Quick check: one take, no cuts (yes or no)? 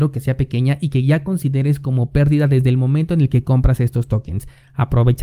yes